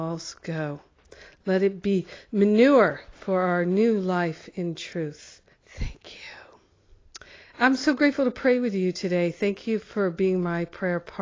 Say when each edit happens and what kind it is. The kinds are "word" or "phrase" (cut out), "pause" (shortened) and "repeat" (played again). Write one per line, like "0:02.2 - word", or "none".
0:03.2 - pause
0:05.5 - pause